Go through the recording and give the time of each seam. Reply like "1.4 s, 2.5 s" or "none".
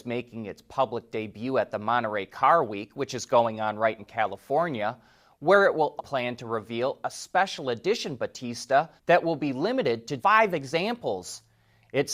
4.0 s, 6.0 s, 9.0 s, 10.2 s